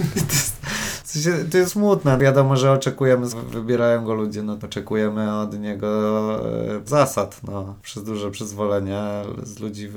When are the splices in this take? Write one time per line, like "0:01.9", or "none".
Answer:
0:01.7
0:03.3
0:04.6
0:06.9

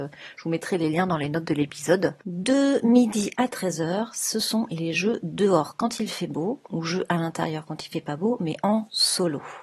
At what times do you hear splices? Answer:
0:02.2

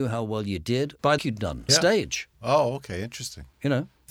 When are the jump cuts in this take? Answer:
0:01.2
0:01.7

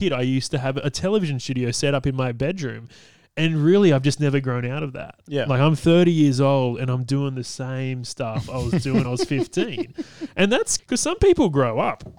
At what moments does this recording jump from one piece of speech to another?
0:09.0
0:10.8

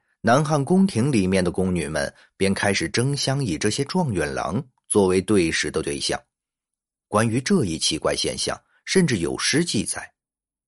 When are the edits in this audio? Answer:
none

